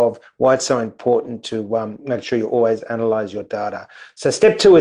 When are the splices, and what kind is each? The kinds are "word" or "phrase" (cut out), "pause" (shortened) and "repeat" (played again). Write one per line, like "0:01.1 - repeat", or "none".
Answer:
none